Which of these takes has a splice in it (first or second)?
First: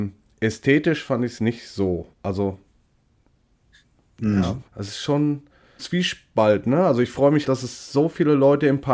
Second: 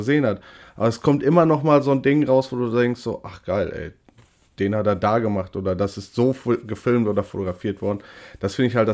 first